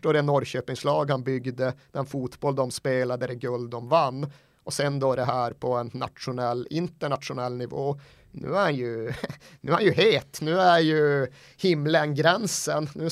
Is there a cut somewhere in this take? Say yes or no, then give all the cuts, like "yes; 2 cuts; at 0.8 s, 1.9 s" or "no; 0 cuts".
no; 0 cuts